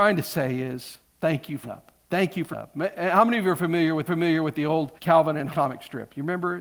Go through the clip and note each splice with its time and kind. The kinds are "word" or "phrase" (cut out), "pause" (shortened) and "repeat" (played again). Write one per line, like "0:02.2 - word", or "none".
0:01.0 - pause
0:01.6 - word
0:02.0 - pause
0:02.5 - word
0:04.1 - repeat
0:05.0 - pause
0:05.5 - word